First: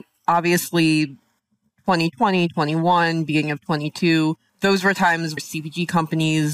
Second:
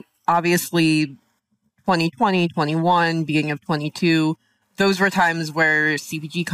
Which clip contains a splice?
first; 2 cuts; at 4.5 s, 5.4 s

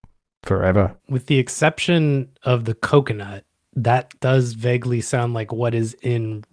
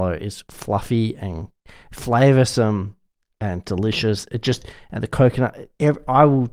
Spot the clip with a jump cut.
first; 3 cuts; at 1.0 s, 2.3 s, 4.2 s

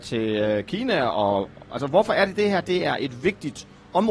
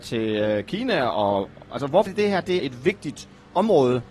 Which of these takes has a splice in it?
second; 2 cuts; at 2.1 s, 2.6 s

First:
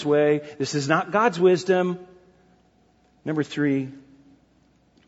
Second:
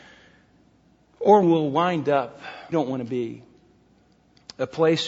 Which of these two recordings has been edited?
second; 2 cuts; at 1.4 s, 2.7 s

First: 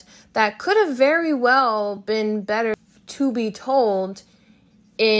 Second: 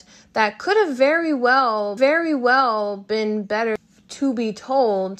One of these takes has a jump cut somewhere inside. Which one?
second; 1 cut; at 2.0 s

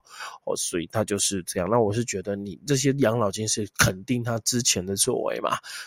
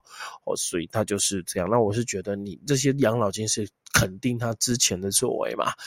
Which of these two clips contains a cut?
first; 1 cut; at 3.7 s

